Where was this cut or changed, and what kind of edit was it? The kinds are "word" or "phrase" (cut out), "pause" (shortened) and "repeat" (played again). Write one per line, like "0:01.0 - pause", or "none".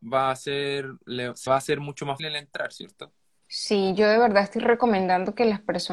0:01.5 - word
0:02.2 - word
0:03.4 - pause

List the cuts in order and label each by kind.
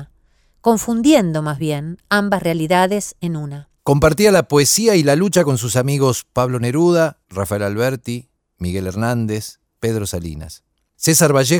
0:03.8 - pause
0:07.2 - pause
0:08.4 - pause
0:09.7 - pause

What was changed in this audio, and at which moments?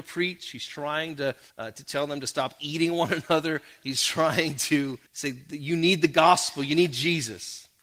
0:01.5 - pause
0:05.1 - pause

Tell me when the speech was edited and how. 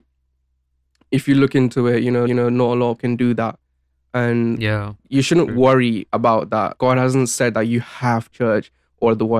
0:02.3 - repeat
0:03.0 - word
0:05.0 - pause
0:06.8 - word
0:08.3 - phrase

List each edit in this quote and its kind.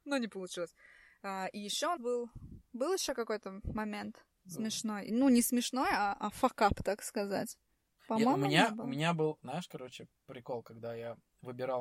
0:02.0 - word
0:04.3 - pause
0:07.7 - pause

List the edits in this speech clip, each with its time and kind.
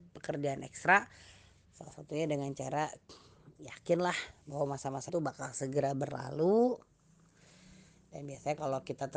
0:05.1 - word

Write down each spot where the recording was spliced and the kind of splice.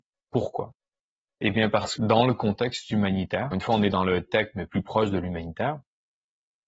0:02.0 - word
0:03.5 - word

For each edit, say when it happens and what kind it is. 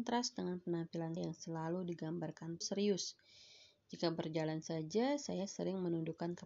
0:01.2 - word
0:02.6 - word

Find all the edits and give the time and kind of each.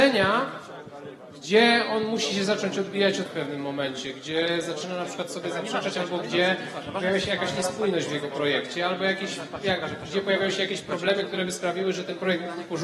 0:03.3 - word

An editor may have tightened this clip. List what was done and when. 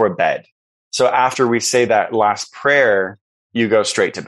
none

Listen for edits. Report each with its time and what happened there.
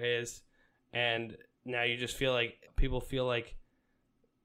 0:02.7 - word

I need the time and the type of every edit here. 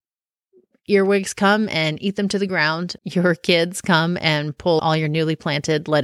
0:03.0 - word
0:04.8 - word

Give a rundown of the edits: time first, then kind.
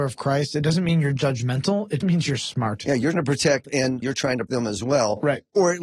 0:02.0 - word
0:03.1 - word
0:03.6 - word
0:04.0 - word
0:04.5 - word

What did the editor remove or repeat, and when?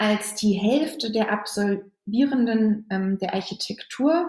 none

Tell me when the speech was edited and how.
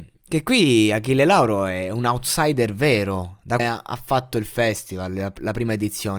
0:03.6 - phrase

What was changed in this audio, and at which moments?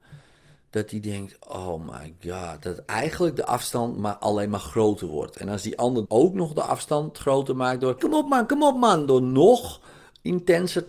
0:06.1 - word
0:08.0 - word

